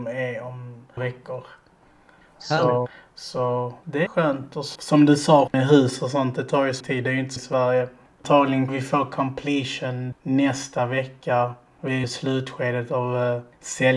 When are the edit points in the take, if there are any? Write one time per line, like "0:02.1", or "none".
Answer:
0:01.0
0:04.1
0:04.8
0:05.5
0:06.8
0:07.4
0:08.7
0:10.1
0:12.0